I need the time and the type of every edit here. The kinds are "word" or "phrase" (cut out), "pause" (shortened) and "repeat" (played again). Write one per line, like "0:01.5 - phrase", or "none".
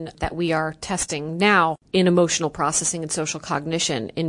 0:01.8 - pause